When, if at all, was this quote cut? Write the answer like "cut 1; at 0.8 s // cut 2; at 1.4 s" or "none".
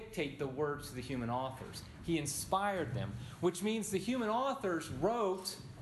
none